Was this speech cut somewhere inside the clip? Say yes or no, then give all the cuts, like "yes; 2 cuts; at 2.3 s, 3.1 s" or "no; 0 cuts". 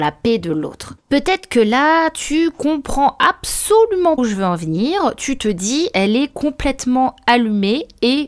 yes; 2 cuts; at 1.0 s, 4.2 s